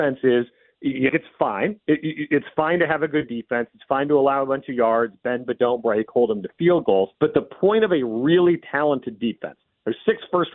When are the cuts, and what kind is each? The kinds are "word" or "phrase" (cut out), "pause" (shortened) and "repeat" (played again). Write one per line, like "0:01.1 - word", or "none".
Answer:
0:01.1 - phrase
0:07.1 - pause

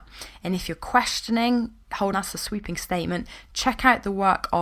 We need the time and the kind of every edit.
0:02.1 - word

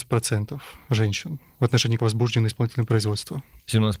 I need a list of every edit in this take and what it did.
0:02.0 - word

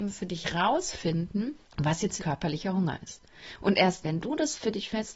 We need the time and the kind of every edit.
0:01.7 - pause
0:02.2 - word
0:04.0 - word

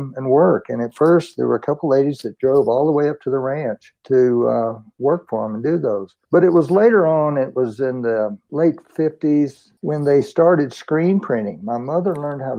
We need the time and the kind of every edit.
none

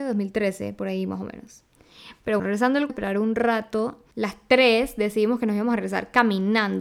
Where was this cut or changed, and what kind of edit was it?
0:02.4 - word
0:02.9 - phrase
0:04.1 - pause

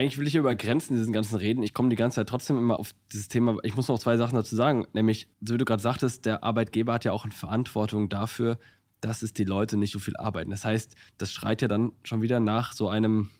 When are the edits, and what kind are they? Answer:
0:02.8 - word
0:05.3 - pause
0:09.9 - phrase

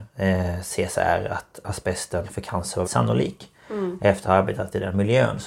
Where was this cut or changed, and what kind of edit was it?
0:02.2 - phrase
0:02.8 - word
0:04.2 - word

